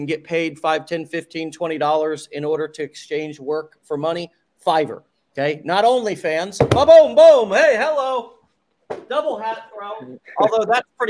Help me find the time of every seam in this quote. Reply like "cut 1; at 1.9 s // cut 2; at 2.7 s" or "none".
none